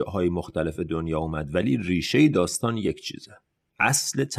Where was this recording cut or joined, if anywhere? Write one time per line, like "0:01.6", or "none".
none